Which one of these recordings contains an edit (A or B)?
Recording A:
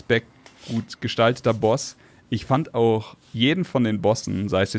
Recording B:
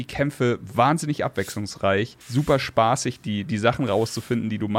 B